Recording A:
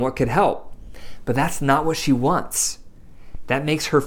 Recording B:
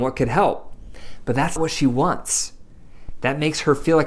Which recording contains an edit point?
B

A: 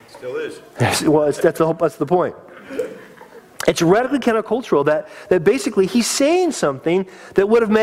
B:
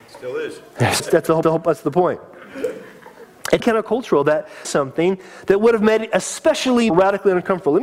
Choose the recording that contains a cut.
B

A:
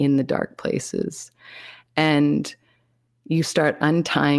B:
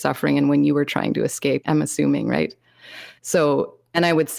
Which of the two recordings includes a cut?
B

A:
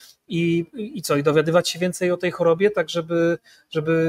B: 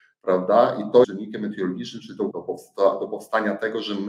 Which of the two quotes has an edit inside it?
B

